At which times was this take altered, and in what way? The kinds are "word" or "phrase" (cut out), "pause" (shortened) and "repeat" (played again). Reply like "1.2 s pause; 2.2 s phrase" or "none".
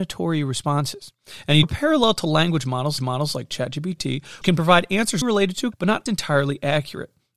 1.6 s word; 3.0 s repeat; 4.4 s word; 5.2 s word; 5.7 s word; 6.1 s word